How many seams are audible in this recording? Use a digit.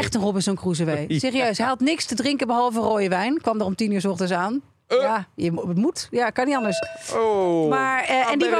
0